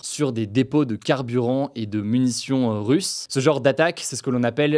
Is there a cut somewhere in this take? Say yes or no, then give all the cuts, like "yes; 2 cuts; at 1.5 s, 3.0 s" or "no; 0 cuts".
no; 0 cuts